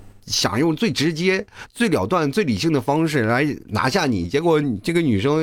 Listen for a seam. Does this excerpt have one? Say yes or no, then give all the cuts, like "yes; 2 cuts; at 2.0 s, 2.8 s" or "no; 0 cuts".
no; 0 cuts